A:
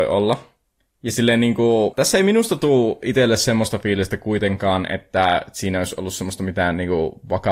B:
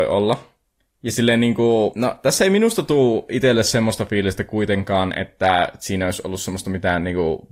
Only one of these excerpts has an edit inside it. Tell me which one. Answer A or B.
A